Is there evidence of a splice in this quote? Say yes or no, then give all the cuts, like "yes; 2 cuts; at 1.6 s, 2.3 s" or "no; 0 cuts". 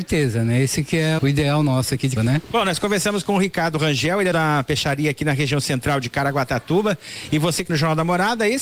yes; 4 cuts; at 1.2 s, 2.2 s, 4.3 s, 7.7 s